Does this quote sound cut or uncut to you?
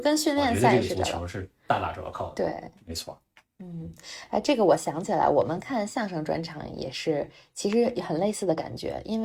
uncut